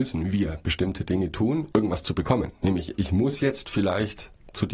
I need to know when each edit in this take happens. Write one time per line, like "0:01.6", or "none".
0:01.7